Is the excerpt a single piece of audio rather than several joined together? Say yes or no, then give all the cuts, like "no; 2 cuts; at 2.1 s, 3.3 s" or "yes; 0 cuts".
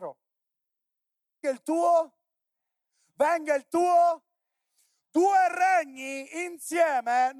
no; 1 cut; at 1.4 s